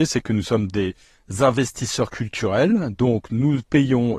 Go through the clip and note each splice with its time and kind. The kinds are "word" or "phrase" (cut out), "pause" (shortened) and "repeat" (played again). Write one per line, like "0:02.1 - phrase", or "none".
none